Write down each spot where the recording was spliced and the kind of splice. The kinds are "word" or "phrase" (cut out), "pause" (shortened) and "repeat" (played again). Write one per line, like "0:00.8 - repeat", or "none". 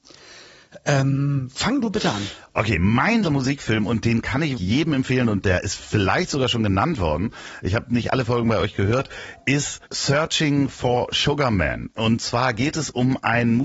0:03.2 - word
0:04.6 - word
0:09.8 - pause